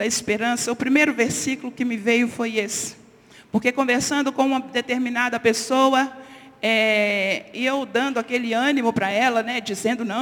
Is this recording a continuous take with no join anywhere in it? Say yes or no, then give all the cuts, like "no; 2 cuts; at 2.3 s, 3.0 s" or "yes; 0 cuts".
yes; 0 cuts